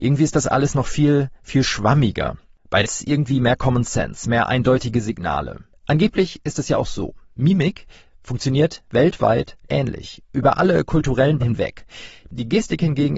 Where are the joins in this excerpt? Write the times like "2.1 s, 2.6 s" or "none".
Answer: 2.8 s, 9.7 s, 11.4 s